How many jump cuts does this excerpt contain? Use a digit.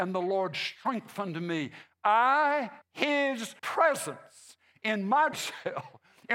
3